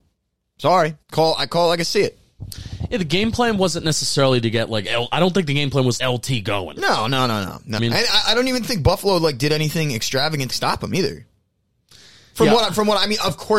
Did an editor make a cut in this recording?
yes; 4 cuts; at 1.0 s, 6.0 s, 7.8 s, 10.5 s

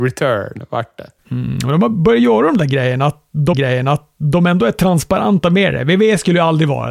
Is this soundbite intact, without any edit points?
no; 2 cuts; at 1.2 s, 3.5 s

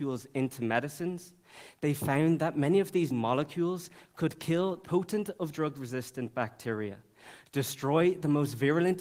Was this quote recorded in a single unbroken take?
no; 2 cuts; at 3.1 s, 4.8 s

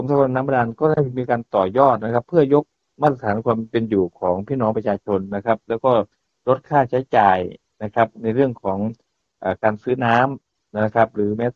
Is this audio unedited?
yes; 0 cuts

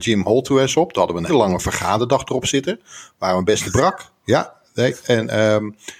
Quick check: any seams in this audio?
yes; 2 cuts; at 1.3 s, 3.6 s

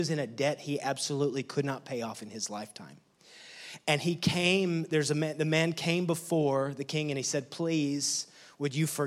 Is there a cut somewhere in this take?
no; 0 cuts

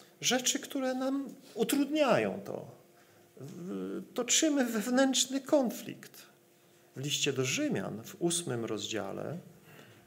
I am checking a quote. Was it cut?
yes; 1 cut; at 6.5 s

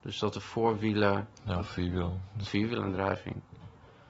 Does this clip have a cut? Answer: yes; 2 cuts; at 1.3 s, 2.5 s

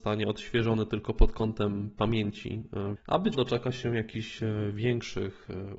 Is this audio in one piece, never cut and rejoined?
no; 2 cuts; at 3.0 s, 3.3 s

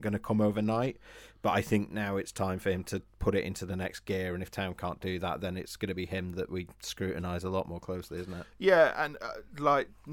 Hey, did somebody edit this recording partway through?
no; 0 cuts

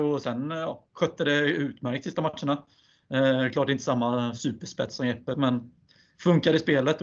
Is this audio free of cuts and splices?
yes; 0 cuts

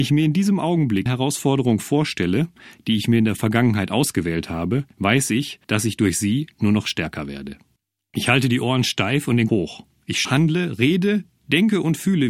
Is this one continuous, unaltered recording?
no; 6 cuts; at 1.1 s, 4.9 s, 5.6 s, 7.8 s, 9.5 s, 10.2 s

